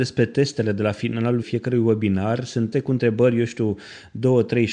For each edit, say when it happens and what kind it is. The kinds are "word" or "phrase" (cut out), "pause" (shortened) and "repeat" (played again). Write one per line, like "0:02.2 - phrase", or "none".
0:01.4 - word
0:02.7 - word